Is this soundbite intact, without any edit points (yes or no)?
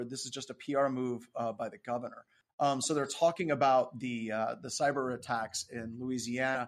yes